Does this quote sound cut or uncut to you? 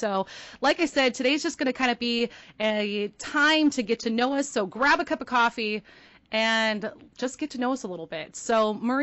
uncut